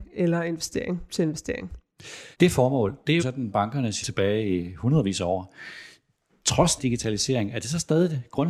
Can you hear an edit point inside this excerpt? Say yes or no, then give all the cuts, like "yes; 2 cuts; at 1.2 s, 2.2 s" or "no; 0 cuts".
yes; 5 cuts; at 1.1 s, 2.3 s, 3.2 s, 4.0 s, 6.8 s